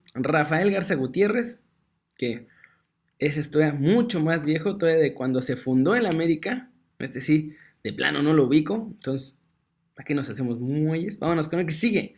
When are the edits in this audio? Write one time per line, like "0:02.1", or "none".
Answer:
none